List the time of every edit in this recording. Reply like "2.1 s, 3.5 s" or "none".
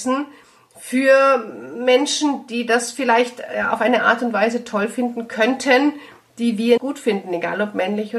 6.8 s